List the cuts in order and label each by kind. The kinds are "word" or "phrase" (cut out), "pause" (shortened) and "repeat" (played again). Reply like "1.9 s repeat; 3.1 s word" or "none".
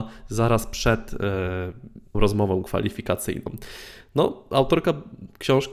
2.1 s word